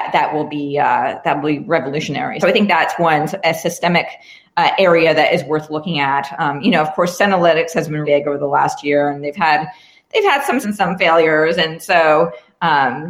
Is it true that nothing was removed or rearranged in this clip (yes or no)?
no